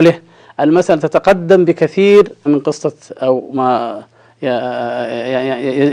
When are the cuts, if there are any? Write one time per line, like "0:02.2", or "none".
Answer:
0:02.5